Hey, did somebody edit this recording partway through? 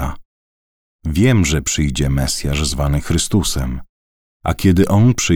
no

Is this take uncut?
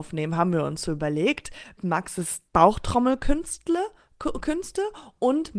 no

